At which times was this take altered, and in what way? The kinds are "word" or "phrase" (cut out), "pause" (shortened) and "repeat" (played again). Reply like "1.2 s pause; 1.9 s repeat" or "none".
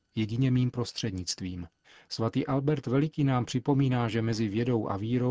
1.8 s pause